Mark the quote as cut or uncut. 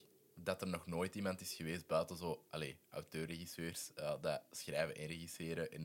uncut